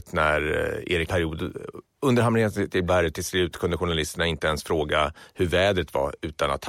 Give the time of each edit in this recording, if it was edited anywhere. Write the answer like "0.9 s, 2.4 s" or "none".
1.1 s, 2.9 s